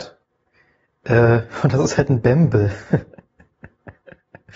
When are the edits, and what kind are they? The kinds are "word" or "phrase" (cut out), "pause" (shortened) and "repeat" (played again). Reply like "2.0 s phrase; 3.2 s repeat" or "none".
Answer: none